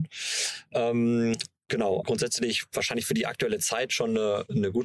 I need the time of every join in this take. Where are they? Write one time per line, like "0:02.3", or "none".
0:02.0